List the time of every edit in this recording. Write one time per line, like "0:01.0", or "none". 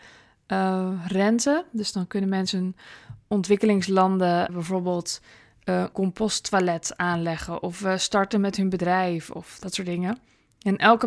0:04.5
0:05.9